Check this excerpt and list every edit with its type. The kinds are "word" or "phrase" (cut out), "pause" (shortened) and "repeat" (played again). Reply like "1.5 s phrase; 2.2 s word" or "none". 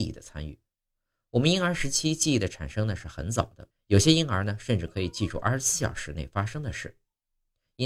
3.7 s pause